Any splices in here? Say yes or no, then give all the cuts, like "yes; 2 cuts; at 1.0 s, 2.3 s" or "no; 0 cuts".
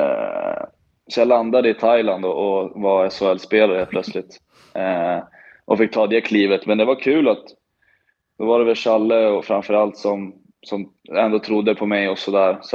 no; 0 cuts